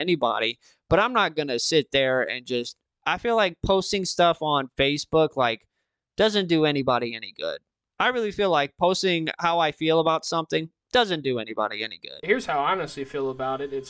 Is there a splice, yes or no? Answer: no